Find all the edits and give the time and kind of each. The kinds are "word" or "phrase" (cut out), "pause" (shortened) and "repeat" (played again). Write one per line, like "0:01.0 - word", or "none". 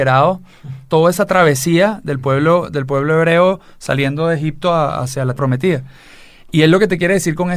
0:05.4 - word